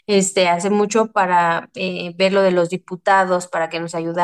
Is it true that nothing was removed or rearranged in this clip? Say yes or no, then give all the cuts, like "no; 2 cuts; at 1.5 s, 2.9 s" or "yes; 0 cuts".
yes; 0 cuts